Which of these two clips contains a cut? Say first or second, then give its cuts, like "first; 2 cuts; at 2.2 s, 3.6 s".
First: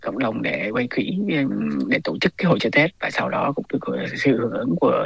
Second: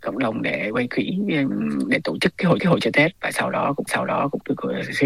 second; 2 cuts; at 2.6 s, 3.9 s